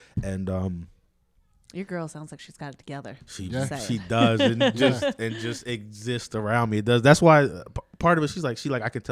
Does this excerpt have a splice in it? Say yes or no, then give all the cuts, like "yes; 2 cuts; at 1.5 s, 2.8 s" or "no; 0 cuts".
no; 0 cuts